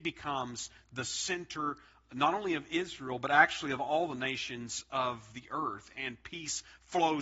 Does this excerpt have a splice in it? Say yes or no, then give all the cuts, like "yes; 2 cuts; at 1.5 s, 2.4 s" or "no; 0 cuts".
no; 0 cuts